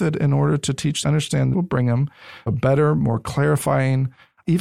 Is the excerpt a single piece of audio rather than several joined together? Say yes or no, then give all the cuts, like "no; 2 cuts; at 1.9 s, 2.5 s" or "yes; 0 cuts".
no; 3 cuts; at 1.0 s, 1.5 s, 2.5 s